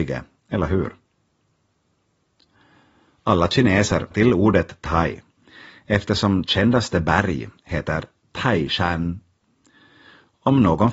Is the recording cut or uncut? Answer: cut